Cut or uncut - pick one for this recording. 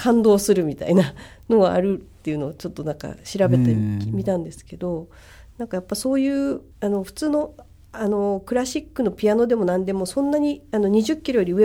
cut